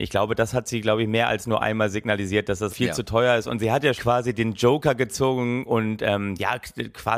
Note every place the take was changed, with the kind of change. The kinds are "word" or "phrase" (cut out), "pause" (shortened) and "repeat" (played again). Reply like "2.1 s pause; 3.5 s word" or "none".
2.7 s word; 4.0 s word